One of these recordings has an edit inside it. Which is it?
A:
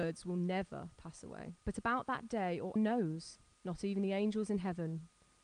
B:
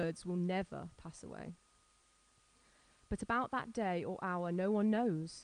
A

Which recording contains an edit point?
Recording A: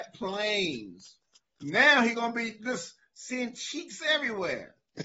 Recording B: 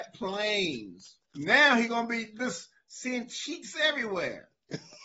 B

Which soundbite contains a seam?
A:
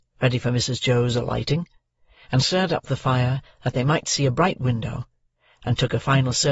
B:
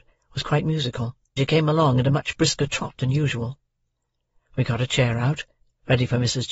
B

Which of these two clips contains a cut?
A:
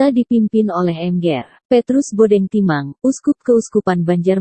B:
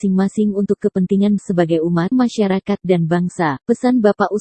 B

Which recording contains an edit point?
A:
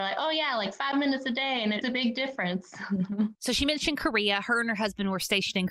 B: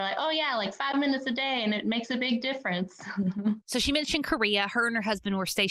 A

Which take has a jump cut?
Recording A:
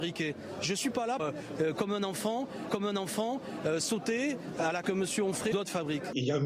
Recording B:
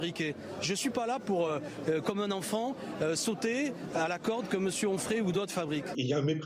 A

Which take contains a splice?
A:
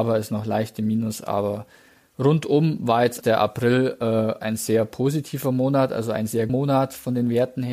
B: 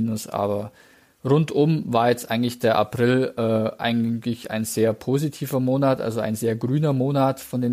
A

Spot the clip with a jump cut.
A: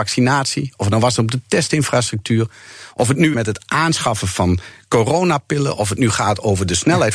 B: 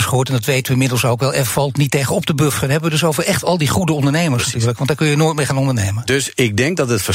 A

